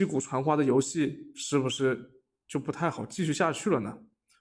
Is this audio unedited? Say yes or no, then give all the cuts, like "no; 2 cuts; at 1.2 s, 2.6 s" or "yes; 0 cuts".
yes; 0 cuts